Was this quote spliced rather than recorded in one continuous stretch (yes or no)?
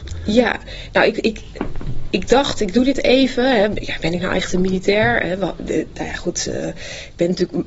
no